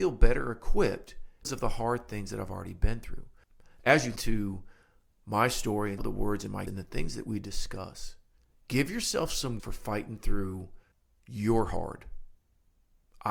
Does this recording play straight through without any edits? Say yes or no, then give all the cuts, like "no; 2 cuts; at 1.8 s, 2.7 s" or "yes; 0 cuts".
no; 7 cuts; at 1.4 s, 4.2 s, 6.0 s, 6.7 s, 8.4 s, 9.6 s, 10.9 s